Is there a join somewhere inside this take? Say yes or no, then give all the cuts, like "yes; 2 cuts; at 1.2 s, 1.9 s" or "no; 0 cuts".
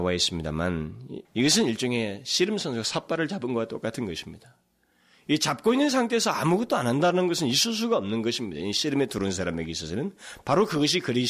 yes; 1 cut; at 1.2 s